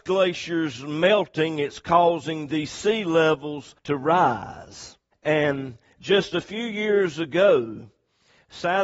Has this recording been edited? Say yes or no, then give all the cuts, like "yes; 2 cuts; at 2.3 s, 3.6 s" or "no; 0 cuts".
yes; 2 cuts; at 3.8 s, 5.1 s